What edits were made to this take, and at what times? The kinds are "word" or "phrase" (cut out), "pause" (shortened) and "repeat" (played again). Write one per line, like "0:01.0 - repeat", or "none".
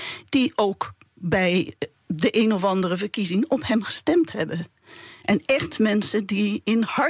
none